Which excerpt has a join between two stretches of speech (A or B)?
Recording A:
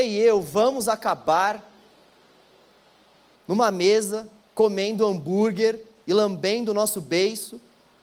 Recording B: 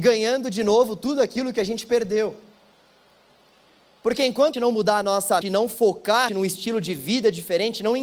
B